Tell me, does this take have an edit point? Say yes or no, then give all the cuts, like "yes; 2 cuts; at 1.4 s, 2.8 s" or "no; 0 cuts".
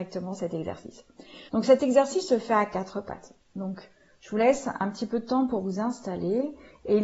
yes; 2 cuts; at 1.5 s, 3.4 s